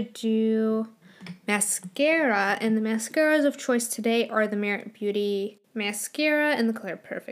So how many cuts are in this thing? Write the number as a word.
zero